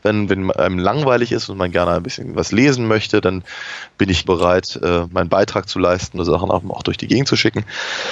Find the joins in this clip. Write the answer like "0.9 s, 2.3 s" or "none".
4.2 s, 5.1 s, 6.2 s